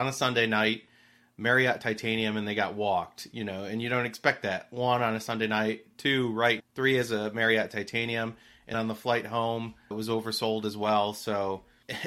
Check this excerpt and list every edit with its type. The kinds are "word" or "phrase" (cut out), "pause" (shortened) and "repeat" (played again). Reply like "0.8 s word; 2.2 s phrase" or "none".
6.6 s word; 8.7 s word; 9.9 s word